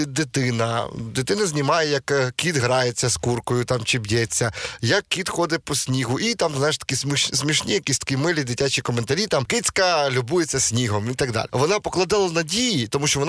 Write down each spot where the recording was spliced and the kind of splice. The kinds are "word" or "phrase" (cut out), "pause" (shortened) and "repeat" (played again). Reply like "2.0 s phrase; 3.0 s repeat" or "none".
none